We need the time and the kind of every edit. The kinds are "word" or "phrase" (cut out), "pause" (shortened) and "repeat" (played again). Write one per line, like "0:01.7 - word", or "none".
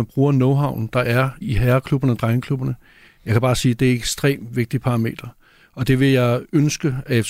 0:01.4 - word